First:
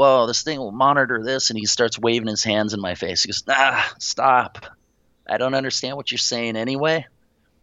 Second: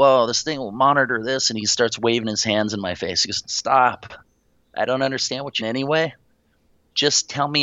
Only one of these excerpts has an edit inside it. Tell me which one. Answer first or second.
second